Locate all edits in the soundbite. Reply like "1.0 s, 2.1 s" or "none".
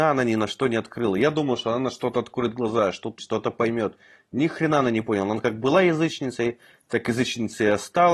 3.2 s